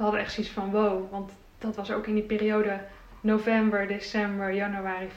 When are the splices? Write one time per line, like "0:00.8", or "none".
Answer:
none